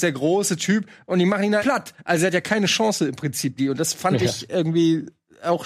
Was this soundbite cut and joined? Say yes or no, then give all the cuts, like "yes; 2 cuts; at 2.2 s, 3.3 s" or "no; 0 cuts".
yes; 2 cuts; at 1.6 s, 3.6 s